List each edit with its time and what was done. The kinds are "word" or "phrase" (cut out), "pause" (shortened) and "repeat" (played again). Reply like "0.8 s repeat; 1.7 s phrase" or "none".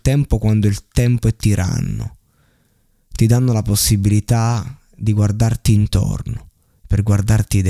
none